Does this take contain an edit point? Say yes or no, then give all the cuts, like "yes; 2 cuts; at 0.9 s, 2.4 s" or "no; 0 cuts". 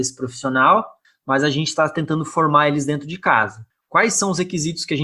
no; 0 cuts